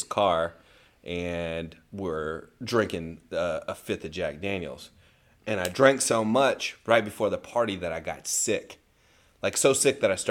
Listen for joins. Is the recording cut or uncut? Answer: uncut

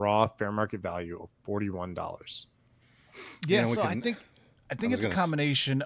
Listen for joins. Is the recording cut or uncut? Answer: uncut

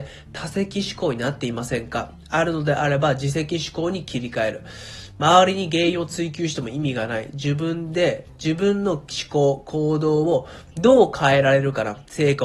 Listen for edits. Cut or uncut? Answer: cut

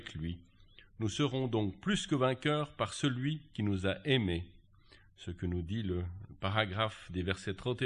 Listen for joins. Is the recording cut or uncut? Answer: uncut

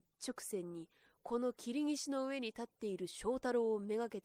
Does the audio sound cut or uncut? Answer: uncut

